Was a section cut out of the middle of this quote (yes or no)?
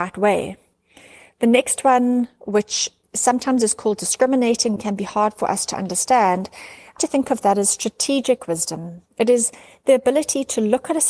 yes